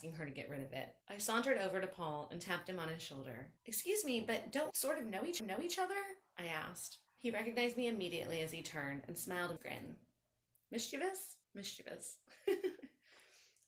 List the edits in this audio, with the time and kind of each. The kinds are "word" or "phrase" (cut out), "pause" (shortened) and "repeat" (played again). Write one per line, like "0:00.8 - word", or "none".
0:01.0 - pause
0:03.6 - pause
0:04.7 - word
0:05.4 - repeat
0:07.1 - pause
0:09.6 - word
0:11.4 - pause